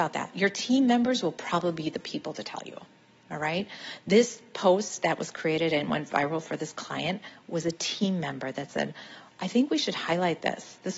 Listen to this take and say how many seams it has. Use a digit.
0